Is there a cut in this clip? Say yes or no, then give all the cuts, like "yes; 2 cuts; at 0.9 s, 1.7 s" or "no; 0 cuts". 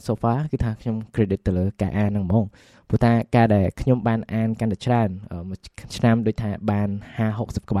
no; 0 cuts